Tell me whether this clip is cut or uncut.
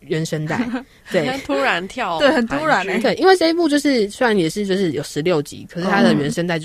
uncut